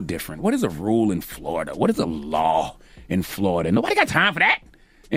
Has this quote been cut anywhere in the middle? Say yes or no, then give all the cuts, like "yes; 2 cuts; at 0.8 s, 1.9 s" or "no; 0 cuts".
no; 0 cuts